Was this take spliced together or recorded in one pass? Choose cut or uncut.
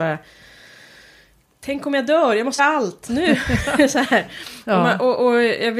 cut